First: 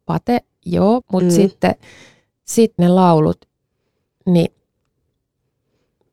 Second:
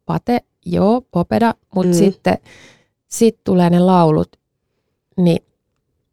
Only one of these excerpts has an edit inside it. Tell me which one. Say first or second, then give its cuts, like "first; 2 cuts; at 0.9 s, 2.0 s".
first; 2 cuts; at 1.0 s, 2.8 s